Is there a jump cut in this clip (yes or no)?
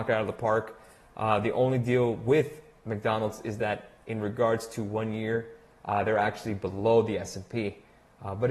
no